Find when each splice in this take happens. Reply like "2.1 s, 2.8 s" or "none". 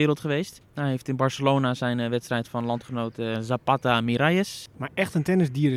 2.5 s